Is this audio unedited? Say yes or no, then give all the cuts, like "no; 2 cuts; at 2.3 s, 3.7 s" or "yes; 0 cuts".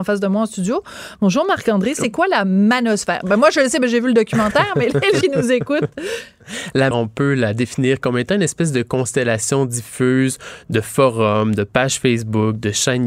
no; 2 cuts; at 5.2 s, 6.9 s